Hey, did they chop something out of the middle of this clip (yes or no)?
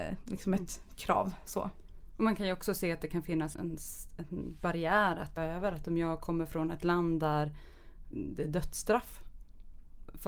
yes